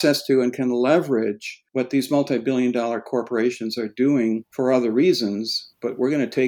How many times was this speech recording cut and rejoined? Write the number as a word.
one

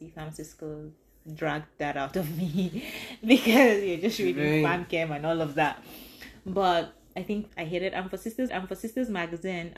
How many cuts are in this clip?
two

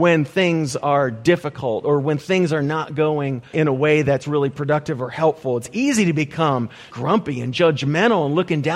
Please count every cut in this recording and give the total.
two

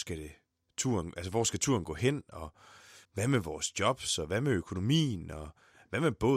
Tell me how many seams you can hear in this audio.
one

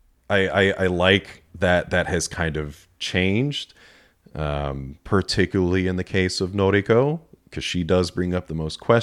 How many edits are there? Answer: two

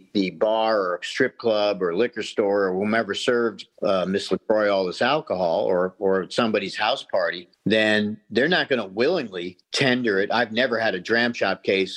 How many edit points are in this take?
three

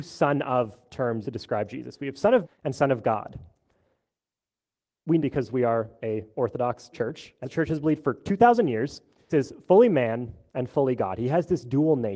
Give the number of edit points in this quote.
six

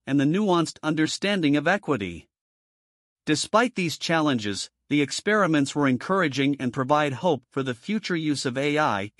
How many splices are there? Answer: zero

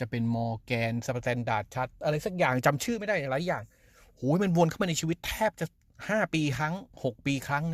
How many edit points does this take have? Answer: zero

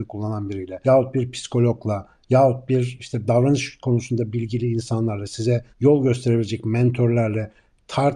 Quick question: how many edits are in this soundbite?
one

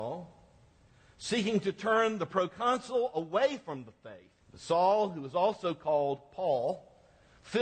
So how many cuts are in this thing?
one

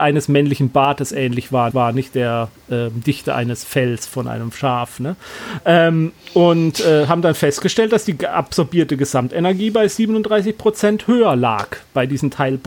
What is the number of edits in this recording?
one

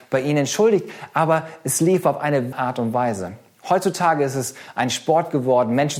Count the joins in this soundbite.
one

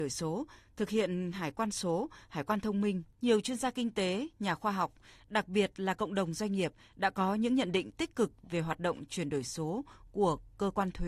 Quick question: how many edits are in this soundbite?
one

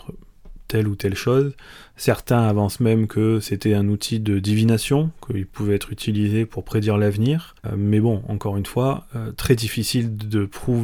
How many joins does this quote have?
zero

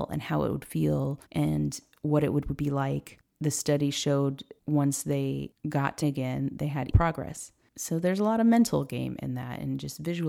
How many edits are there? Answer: four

